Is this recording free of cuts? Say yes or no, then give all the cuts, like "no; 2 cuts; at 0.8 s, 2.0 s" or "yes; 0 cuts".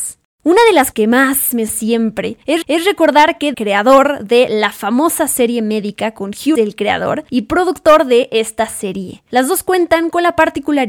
no; 5 cuts; at 0.9 s, 1.7 s, 2.6 s, 3.5 s, 6.6 s